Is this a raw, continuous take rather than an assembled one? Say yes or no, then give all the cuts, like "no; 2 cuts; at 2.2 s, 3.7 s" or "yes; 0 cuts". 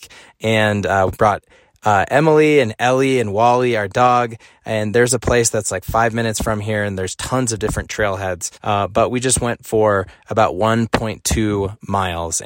no; 1 cut; at 8.6 s